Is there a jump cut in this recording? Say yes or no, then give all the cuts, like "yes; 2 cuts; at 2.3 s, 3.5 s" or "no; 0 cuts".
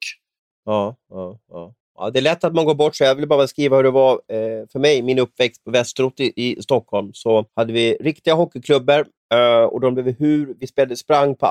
yes; 1 cut; at 7.5 s